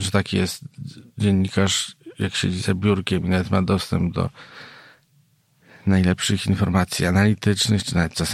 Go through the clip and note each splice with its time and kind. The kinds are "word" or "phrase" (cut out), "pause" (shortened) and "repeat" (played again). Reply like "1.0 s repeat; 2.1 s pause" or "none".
none